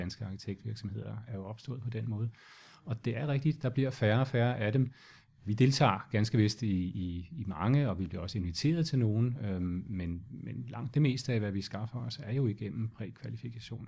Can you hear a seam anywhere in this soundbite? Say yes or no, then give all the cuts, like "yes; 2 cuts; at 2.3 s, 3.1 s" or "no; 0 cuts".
no; 0 cuts